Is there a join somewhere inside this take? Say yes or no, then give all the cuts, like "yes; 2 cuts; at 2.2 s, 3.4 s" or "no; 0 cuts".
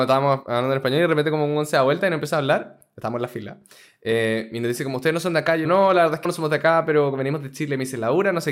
yes; 2 cuts; at 5.6 s, 6.2 s